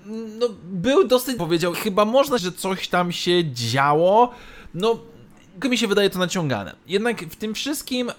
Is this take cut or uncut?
cut